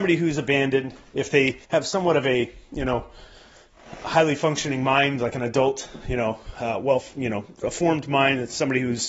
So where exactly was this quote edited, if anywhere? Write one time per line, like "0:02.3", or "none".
0:01.6